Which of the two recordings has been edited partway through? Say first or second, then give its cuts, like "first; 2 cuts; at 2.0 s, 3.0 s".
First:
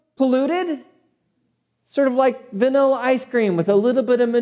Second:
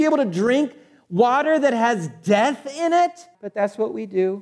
second; 1 cut; at 3.3 s